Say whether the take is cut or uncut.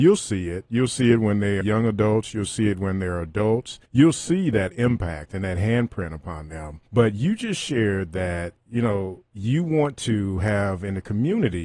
cut